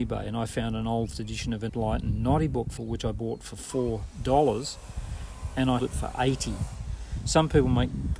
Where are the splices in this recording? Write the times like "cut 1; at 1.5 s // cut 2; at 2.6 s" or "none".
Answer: cut 1; at 1.1 s // cut 2; at 1.7 s // cut 3; at 2.8 s // cut 4; at 5.8 s